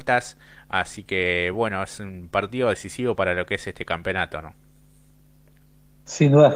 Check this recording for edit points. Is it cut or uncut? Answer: uncut